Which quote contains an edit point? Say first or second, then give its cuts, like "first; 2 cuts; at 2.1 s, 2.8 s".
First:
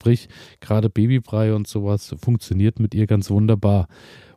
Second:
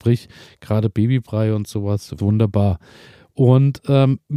second; 1 cut; at 2.2 s